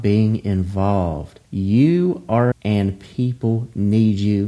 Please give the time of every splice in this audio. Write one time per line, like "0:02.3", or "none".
0:01.4
0:02.5